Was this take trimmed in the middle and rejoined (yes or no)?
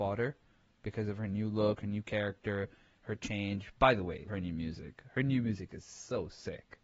yes